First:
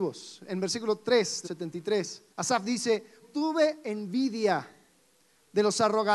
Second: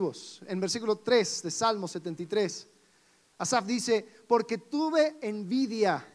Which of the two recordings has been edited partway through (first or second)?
first